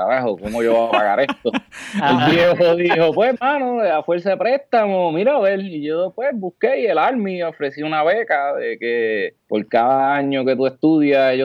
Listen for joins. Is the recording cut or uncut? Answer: cut